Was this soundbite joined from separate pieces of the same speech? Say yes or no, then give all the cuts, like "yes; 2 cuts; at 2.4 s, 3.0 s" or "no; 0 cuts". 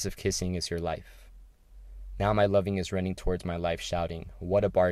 no; 0 cuts